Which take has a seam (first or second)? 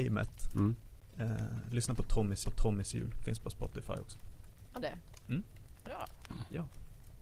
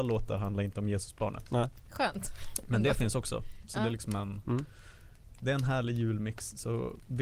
first